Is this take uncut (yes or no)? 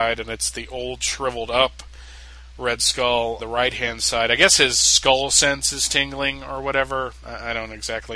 no